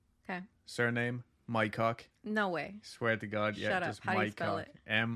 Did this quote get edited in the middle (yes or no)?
yes